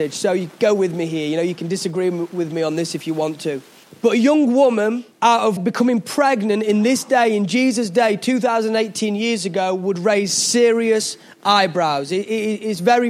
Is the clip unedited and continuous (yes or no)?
no